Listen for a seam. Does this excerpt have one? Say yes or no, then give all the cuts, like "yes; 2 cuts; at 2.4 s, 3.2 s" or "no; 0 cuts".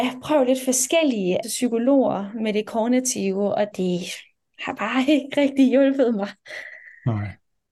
yes; 2 cuts; at 1.4 s, 3.7 s